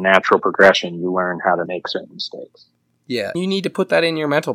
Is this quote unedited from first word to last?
no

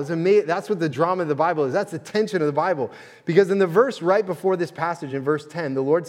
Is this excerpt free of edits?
yes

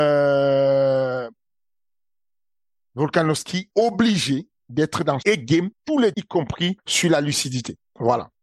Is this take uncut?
no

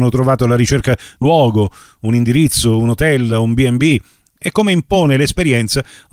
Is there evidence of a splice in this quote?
yes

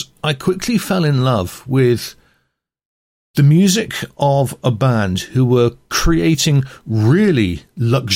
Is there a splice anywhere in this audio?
no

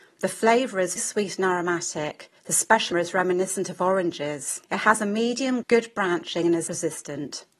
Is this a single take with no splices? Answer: no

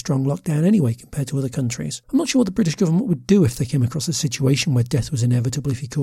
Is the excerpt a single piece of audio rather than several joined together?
no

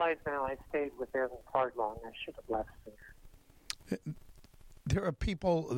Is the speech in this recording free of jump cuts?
no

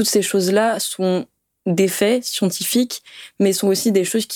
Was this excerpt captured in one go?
yes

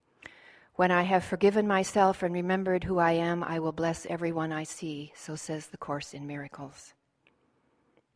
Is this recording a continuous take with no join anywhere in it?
yes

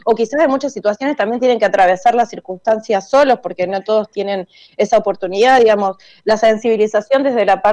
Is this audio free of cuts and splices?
yes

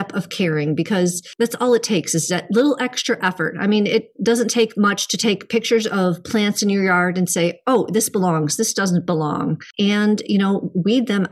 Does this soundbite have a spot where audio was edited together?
no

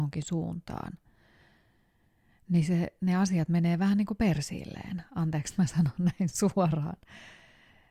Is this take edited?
no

